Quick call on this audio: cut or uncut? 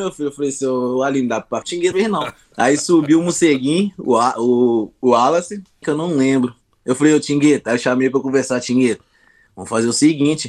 cut